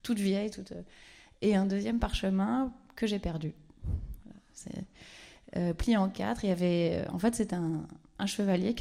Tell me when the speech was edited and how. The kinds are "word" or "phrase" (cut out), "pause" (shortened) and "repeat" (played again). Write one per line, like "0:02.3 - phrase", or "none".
none